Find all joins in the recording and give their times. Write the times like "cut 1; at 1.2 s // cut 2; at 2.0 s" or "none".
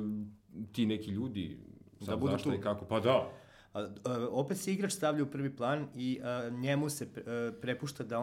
none